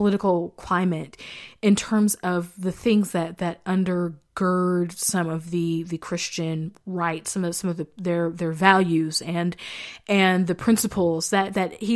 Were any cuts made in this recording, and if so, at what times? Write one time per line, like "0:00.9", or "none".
none